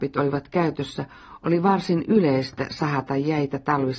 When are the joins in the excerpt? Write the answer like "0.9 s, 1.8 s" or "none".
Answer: none